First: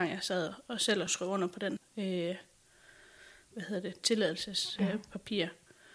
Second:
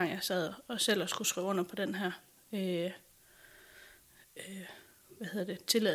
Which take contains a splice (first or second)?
first